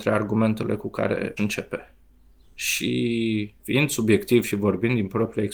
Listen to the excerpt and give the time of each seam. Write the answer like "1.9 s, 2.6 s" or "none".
1.4 s, 3.6 s